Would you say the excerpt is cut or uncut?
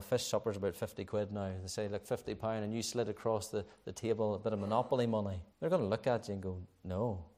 cut